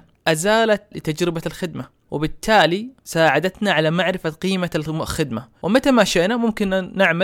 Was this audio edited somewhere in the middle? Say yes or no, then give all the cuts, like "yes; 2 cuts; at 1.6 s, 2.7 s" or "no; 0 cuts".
yes; 1 cut; at 0.9 s